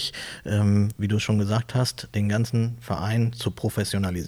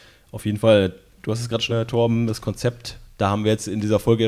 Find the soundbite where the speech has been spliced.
second; 2 cuts; at 1.7 s, 2.3 s

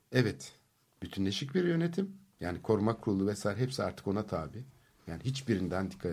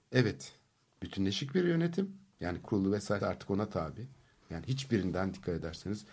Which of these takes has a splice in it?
second; 2 cuts; at 2.6 s, 3.2 s

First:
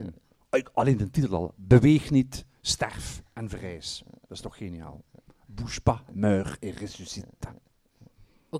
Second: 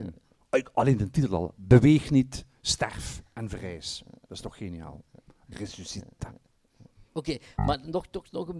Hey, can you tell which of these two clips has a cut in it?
second; 2 cuts; at 5.5 s, 7.1 s

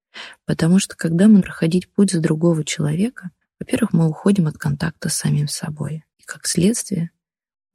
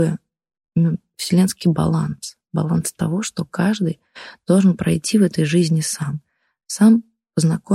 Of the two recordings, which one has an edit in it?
first; 3 cuts; at 1.4 s, 3.4 s, 6.1 s

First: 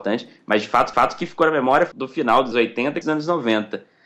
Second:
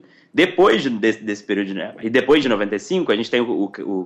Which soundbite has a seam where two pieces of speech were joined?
first; 4 cuts; at 0.9 s, 1.9 s, 2.5 s, 3.0 s

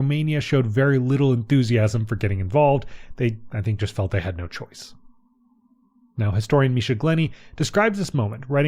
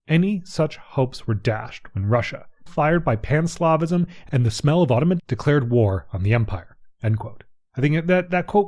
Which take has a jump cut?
second; 3 cuts; at 2.7 s, 5.2 s, 7.6 s

